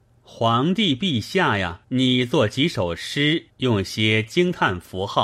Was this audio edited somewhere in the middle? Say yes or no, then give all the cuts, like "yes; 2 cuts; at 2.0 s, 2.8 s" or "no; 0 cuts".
yes; 2 cuts; at 1.8 s, 3.5 s